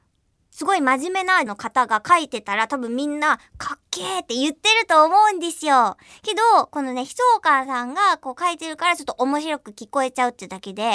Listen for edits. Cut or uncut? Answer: cut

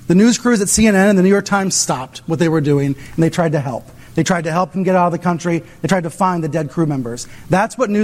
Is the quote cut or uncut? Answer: uncut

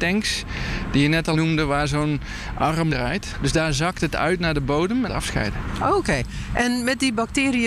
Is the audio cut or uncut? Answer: cut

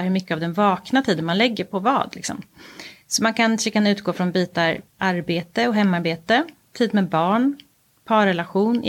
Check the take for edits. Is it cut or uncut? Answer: uncut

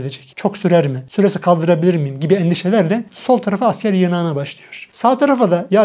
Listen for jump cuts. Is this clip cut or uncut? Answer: uncut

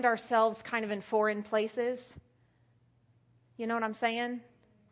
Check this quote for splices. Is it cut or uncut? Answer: uncut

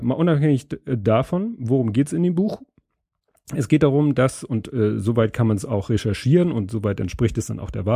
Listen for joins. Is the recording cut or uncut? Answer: uncut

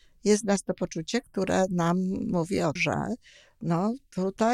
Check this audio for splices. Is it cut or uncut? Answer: cut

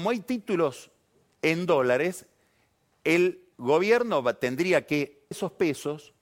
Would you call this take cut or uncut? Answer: cut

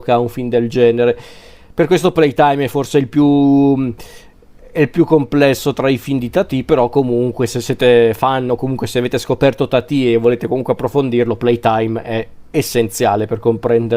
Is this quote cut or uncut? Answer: uncut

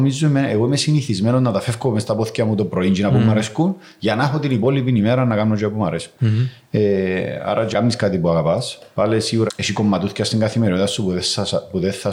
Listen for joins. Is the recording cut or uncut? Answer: cut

